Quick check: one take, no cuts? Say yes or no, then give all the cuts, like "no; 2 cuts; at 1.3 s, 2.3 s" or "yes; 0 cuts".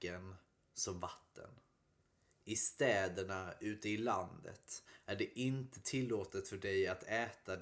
yes; 0 cuts